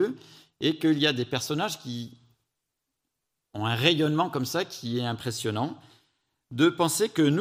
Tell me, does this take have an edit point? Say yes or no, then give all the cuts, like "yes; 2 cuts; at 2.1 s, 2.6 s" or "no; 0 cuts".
no; 0 cuts